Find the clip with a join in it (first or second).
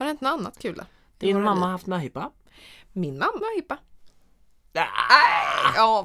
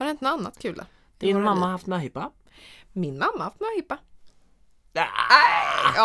first